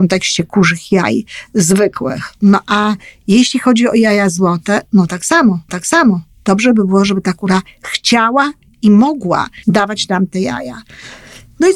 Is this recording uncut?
no; 2 cuts; at 5.7 s, 9.6 s

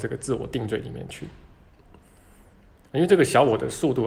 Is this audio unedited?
yes; 0 cuts

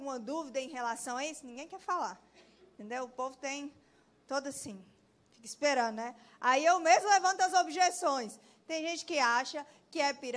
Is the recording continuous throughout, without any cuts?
yes; 0 cuts

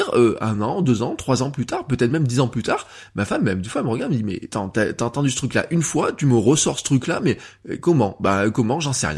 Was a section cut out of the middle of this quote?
yes; 1 cut; at 4.5 s

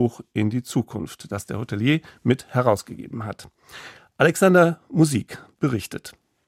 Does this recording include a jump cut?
no; 0 cuts

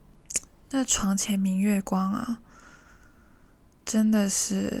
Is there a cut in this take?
no; 0 cuts

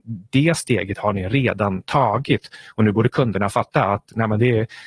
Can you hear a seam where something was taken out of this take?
no; 0 cuts

